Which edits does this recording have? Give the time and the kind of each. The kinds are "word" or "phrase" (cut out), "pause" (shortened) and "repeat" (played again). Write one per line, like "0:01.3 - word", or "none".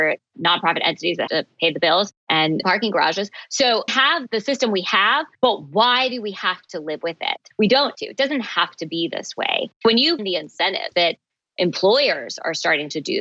0:01.3 - word
0:02.6 - phrase
0:03.9 - word
0:05.3 - pause
0:07.9 - word
0:10.2 - word
0:10.9 - word